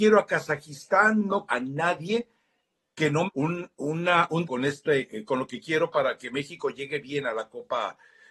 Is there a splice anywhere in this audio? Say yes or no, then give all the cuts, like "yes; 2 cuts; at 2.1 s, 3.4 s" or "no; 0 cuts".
yes; 3 cuts; at 1.5 s, 3.3 s, 4.4 s